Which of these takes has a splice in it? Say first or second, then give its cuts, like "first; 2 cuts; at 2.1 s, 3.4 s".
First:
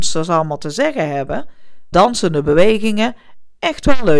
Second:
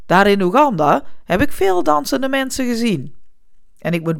first; 1 cut; at 1.9 s